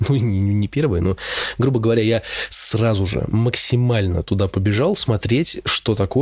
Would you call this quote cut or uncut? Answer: uncut